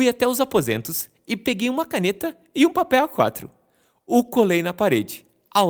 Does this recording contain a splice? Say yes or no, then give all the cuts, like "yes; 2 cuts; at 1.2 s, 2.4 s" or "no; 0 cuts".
no; 0 cuts